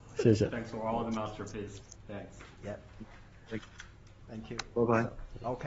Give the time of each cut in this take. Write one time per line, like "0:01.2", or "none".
none